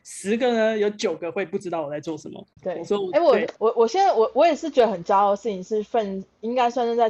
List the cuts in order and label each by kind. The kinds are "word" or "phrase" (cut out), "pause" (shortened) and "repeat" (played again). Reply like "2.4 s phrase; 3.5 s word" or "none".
2.6 s pause; 3.6 s pause